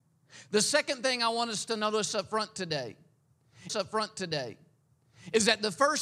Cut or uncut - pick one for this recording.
cut